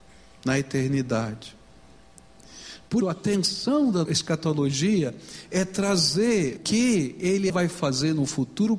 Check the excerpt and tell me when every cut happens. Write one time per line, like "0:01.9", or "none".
0:03.0
0:04.0
0:06.6
0:07.5